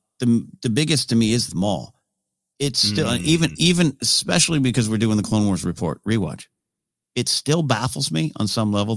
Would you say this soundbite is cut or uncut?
cut